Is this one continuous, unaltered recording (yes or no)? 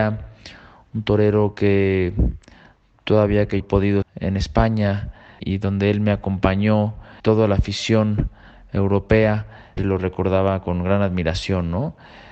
no